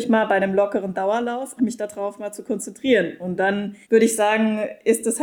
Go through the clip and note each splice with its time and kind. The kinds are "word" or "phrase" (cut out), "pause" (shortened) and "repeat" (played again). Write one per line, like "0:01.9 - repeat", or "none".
0:01.6 - word
0:03.8 - pause